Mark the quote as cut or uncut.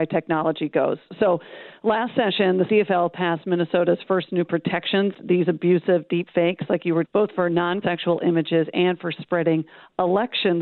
cut